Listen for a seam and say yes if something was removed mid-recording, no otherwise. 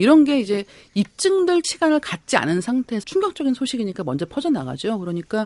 yes